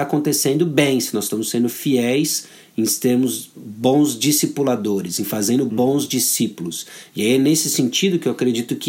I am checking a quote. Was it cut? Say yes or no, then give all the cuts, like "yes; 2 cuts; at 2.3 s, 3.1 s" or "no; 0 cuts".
no; 0 cuts